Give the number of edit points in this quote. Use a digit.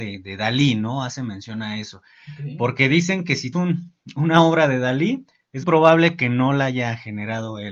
2